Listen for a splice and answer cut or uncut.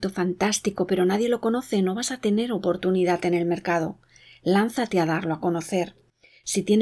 uncut